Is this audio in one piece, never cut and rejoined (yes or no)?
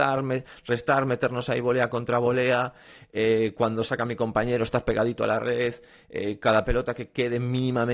yes